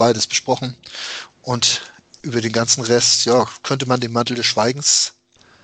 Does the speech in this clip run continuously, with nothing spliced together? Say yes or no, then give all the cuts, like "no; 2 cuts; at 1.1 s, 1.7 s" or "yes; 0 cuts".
yes; 0 cuts